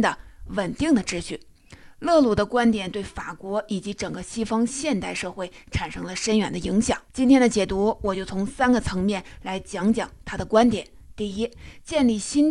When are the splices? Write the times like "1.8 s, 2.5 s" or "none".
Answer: 7.1 s

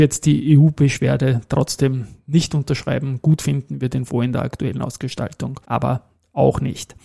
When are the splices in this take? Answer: 5.6 s

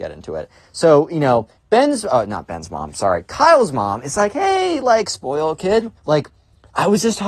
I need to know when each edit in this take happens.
1.6 s, 6.0 s

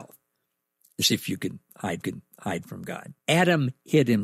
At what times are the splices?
2.0 s, 3.2 s

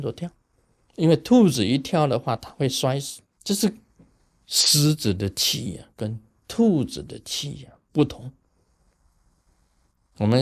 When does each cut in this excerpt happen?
3.3 s

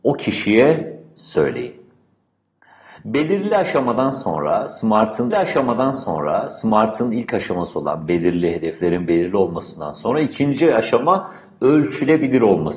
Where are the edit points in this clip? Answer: 5.3 s

